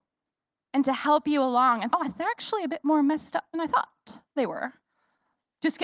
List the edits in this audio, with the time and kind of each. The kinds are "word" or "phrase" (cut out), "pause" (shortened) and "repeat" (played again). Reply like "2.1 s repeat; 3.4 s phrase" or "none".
1.9 s word; 3.5 s word